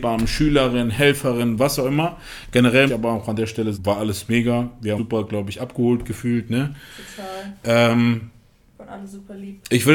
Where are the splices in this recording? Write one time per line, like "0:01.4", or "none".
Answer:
0:02.9
0:03.7
0:05.0

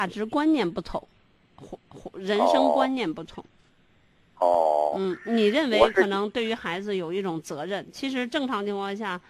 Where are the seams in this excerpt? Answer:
0:01.8

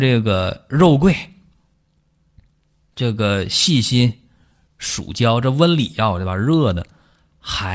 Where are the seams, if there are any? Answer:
none

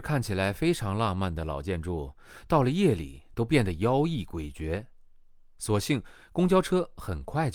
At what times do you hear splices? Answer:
none

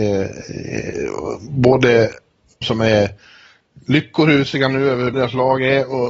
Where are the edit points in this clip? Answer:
0:02.6
0:05.1

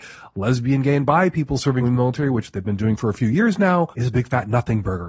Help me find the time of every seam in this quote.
0:01.8
0:03.9

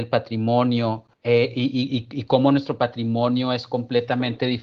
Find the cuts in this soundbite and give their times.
0:01.1

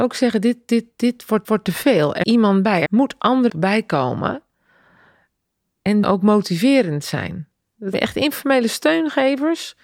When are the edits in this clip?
0:01.4
0:02.2
0:02.9
0:03.5
0:06.0
0:07.9

